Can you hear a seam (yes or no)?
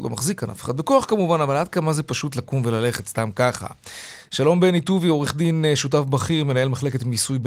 no